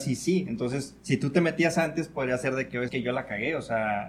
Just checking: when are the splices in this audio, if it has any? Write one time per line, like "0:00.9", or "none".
0:01.0
0:02.9